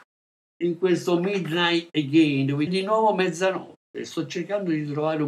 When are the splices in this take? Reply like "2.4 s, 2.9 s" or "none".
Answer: 2.7 s